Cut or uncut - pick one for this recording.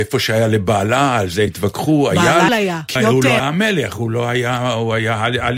cut